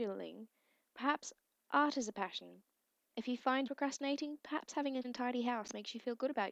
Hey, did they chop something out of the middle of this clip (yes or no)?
yes